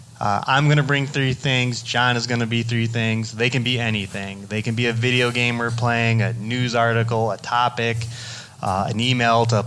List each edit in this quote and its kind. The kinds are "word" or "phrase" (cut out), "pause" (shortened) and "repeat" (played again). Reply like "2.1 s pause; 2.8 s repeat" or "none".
none